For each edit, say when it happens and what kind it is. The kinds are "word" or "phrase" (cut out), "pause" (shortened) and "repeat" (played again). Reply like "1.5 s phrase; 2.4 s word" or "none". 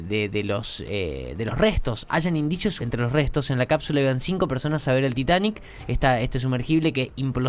2.8 s word